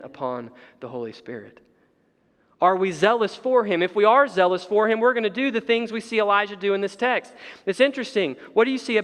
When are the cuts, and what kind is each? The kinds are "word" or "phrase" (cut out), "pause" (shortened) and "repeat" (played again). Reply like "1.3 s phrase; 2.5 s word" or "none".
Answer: none